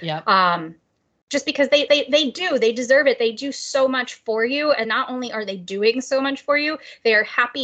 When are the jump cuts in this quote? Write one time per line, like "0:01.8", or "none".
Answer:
0:01.9
0:04.8

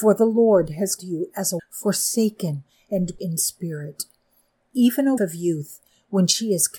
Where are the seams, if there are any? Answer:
0:01.0
0:01.6
0:03.2
0:05.2

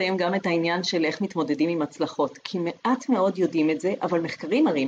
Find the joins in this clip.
none

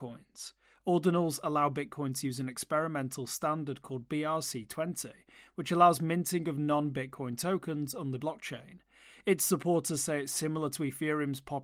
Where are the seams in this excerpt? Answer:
0:08.2

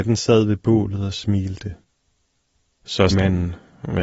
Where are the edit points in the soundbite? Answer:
0:03.1

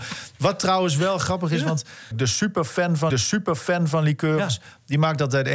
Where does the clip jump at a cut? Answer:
0:02.1
0:03.1

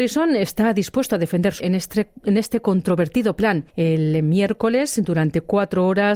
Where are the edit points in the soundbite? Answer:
0:01.6
0:03.7

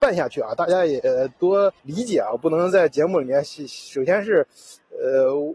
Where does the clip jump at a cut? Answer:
0:01.8

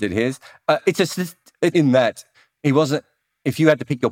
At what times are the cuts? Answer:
0:01.7

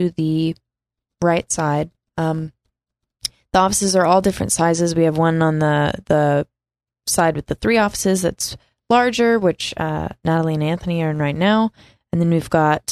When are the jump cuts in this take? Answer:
none

